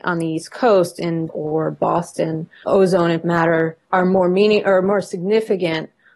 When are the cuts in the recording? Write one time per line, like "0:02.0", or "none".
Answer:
0:01.3
0:02.6
0:03.2
0:03.8

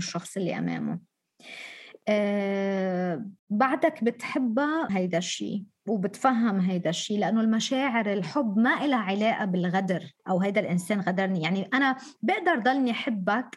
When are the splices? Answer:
0:03.4
0:04.9
0:10.2

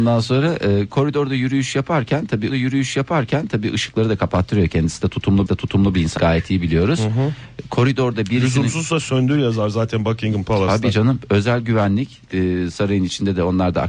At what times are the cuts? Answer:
0:02.5
0:05.5
0:06.2

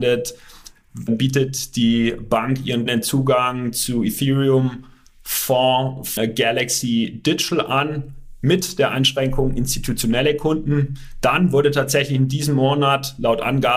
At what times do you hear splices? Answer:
0:01.1
0:02.9
0:06.2

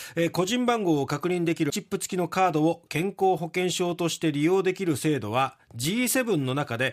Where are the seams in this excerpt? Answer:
0:01.7

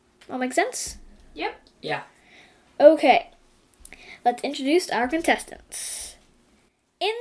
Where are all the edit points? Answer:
none

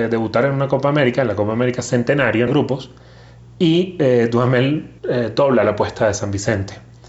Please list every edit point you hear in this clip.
0:02.5
0:05.0

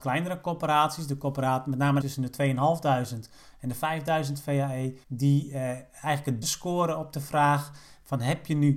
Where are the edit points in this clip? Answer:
0:02.0
0:05.0
0:06.4

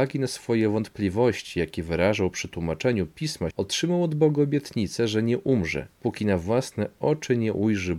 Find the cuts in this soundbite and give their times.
0:03.5
0:05.9

